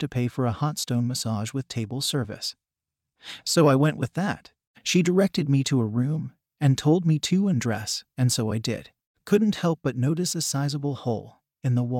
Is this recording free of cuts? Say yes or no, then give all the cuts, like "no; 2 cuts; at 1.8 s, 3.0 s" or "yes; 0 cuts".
yes; 0 cuts